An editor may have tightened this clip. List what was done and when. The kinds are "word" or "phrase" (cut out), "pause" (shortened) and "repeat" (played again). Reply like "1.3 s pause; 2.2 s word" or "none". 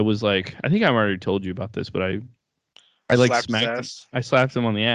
none